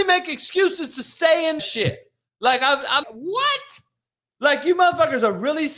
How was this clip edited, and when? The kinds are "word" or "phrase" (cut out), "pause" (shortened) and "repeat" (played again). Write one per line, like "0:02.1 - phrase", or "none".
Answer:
0:01.6 - phrase
0:03.0 - word